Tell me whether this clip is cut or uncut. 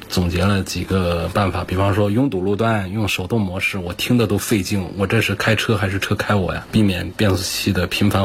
uncut